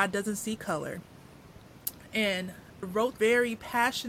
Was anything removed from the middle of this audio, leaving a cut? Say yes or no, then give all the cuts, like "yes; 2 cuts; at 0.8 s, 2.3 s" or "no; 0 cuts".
yes; 2 cuts; at 2.8 s, 3.2 s